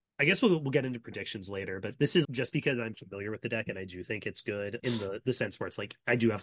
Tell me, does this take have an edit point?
yes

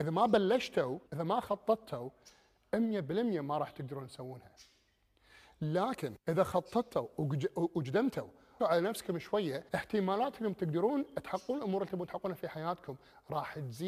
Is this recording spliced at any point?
yes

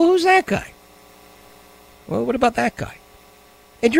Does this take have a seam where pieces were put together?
no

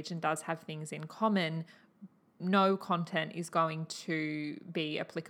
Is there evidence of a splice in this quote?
no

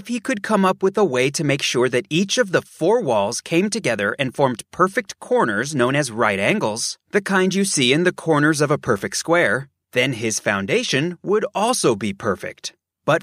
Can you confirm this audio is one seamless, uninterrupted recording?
yes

